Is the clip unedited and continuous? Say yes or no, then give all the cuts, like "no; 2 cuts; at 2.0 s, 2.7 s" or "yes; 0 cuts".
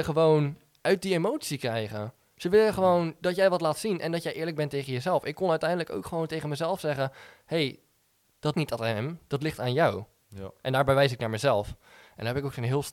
no; 1 cut; at 8.5 s